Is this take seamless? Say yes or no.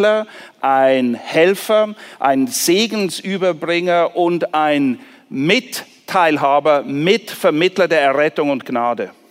yes